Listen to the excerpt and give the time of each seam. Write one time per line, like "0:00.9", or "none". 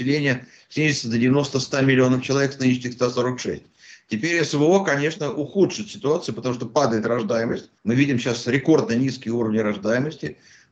0:07.8